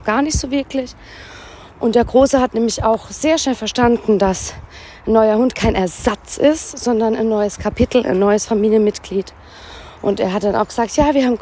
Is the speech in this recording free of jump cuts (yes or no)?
yes